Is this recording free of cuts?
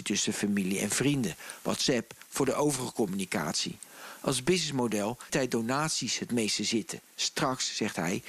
no; 1 cut; at 5.3 s

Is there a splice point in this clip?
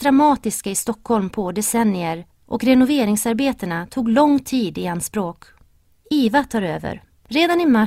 no; 0 cuts

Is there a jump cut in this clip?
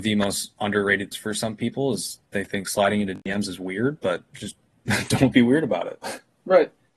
yes; 2 cuts; at 1.1 s, 2.2 s

